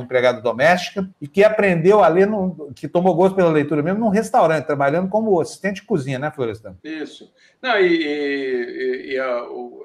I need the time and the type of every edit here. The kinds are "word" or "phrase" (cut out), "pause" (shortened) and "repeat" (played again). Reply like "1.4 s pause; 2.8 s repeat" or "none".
1.1 s pause; 6.8 s pause